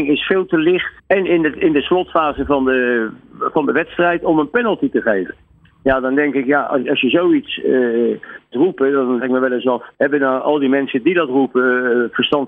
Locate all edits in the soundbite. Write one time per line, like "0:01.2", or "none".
0:01.0
0:08.5
0:09.2
0:09.9